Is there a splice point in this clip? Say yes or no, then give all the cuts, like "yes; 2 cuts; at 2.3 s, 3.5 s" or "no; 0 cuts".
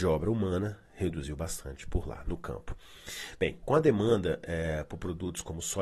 yes; 1 cut; at 2.2 s